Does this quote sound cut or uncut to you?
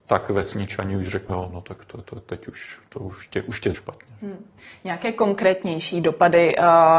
cut